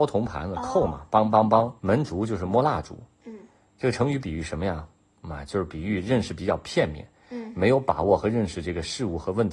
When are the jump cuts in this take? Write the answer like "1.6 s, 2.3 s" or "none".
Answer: 1.8 s